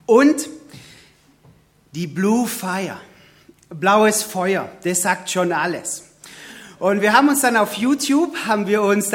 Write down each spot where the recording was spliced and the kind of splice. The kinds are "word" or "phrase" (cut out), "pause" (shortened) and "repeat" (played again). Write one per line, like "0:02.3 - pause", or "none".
none